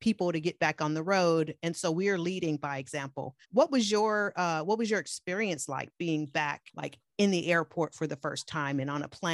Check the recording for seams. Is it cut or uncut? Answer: cut